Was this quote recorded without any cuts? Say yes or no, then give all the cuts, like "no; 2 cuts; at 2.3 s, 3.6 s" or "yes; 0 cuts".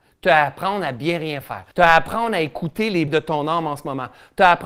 no; 2 cuts; at 1.7 s, 3.1 s